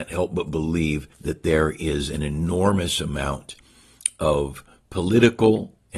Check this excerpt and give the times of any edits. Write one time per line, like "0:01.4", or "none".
0:01.1